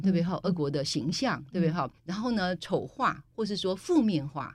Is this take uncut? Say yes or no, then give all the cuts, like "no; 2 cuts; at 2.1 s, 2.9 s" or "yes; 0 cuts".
no; 1 cut; at 2.0 s